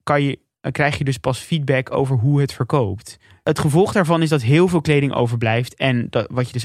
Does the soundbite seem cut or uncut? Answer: uncut